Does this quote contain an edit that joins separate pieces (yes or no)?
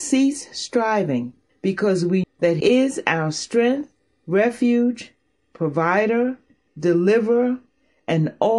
yes